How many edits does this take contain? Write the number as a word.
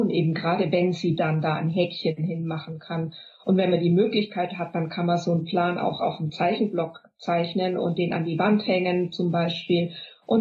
zero